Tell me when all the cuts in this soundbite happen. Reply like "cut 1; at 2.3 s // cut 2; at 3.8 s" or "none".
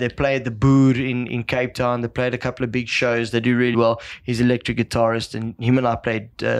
cut 1; at 3.7 s